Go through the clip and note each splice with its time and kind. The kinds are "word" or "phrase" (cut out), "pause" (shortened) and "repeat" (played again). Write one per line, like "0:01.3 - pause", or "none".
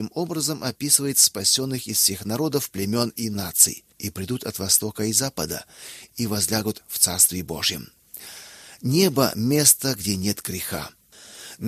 0:03.9 - pause
0:06.1 - phrase